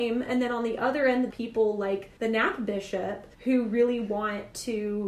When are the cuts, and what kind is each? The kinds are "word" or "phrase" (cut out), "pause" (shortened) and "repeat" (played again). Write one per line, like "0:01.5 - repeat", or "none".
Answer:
0:01.3 - phrase
0:02.2 - pause
0:03.3 - pause